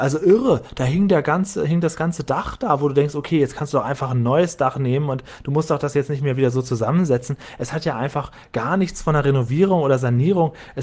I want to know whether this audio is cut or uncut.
uncut